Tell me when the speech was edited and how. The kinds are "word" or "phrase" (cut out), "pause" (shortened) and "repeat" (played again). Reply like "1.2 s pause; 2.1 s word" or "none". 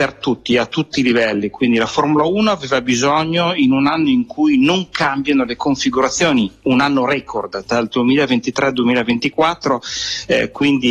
none